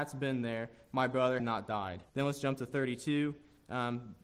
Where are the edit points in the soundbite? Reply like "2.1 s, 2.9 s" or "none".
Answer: 1.4 s, 2.1 s